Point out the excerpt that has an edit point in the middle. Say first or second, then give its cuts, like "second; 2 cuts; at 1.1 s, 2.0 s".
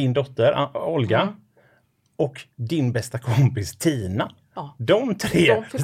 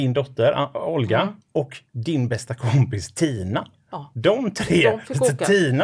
second; 1 cut; at 1.4 s